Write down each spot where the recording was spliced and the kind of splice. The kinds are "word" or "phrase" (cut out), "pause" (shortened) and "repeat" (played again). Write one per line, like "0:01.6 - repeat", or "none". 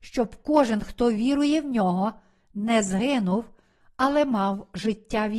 none